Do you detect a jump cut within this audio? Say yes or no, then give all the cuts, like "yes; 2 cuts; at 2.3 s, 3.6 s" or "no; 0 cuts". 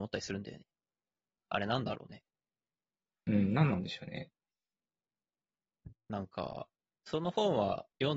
no; 0 cuts